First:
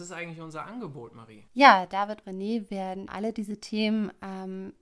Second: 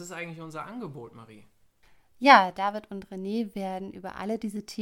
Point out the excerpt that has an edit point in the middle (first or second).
first